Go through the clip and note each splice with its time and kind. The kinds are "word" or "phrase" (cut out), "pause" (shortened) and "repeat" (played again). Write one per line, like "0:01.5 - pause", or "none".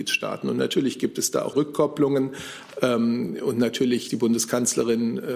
0:01.5 - phrase
0:04.1 - word